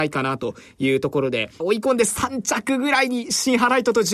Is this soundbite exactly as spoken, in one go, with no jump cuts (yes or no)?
no